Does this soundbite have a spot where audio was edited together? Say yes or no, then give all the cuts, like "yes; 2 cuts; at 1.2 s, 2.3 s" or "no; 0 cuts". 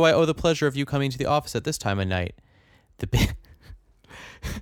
no; 0 cuts